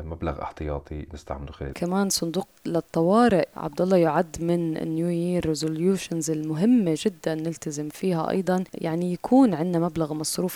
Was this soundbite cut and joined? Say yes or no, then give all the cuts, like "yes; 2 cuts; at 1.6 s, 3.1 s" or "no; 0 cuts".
yes; 1 cut; at 1.7 s